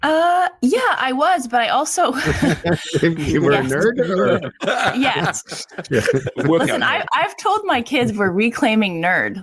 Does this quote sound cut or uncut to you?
uncut